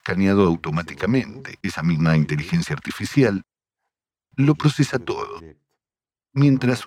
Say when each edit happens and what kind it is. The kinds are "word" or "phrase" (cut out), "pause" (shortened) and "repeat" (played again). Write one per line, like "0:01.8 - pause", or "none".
none